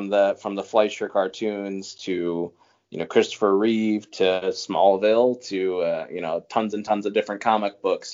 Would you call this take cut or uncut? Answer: uncut